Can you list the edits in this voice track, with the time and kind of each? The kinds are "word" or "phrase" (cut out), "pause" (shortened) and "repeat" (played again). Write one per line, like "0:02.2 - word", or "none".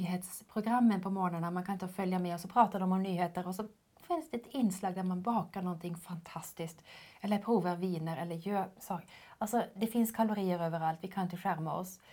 0:01.8 - word